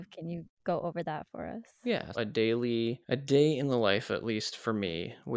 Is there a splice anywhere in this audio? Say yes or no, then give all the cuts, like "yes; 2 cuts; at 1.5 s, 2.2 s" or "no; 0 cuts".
yes; 2 cuts; at 2.1 s, 3.0 s